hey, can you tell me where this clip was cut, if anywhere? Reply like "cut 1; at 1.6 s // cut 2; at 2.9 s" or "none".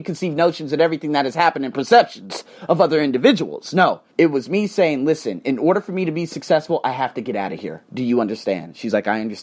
cut 1; at 4.1 s // cut 2; at 7.8 s